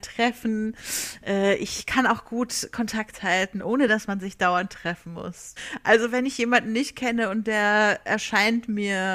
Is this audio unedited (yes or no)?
yes